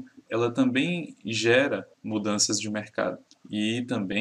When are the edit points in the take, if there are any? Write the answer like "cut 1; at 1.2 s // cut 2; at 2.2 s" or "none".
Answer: cut 1; at 1.9 s // cut 2; at 3.3 s